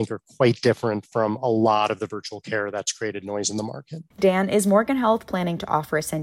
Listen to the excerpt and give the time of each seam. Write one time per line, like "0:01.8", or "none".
0:04.1

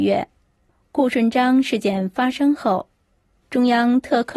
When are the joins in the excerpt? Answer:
none

